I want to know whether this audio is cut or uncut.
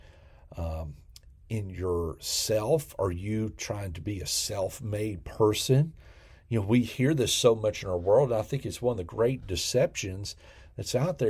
uncut